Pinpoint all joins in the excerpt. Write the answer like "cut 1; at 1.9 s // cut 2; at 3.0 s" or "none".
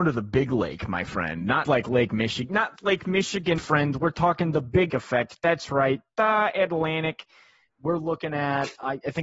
cut 1; at 1.6 s // cut 2; at 2.8 s // cut 3; at 3.6 s // cut 4; at 4.9 s